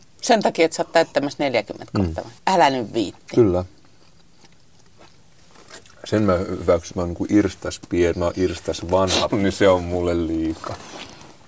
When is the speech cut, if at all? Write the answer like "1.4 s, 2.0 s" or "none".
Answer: 2.4 s, 6.9 s, 8.1 s, 9.3 s